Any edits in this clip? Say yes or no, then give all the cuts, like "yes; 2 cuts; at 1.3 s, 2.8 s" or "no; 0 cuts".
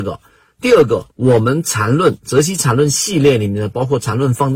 yes; 1 cut; at 1.1 s